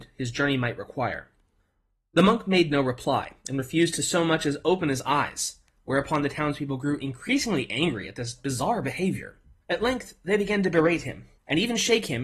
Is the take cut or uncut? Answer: uncut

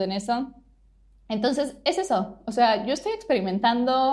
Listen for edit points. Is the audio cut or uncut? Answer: uncut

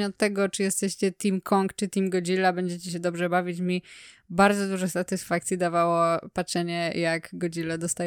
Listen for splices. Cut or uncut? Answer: uncut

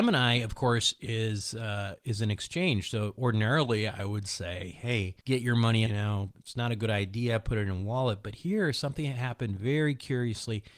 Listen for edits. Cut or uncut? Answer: cut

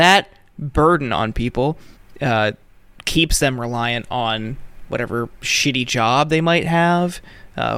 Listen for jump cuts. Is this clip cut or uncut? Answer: uncut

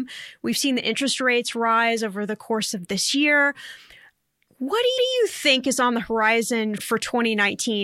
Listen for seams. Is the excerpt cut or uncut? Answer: cut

